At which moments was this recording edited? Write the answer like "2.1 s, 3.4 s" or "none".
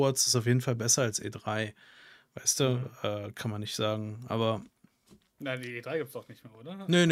none